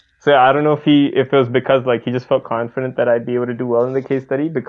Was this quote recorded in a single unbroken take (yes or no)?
yes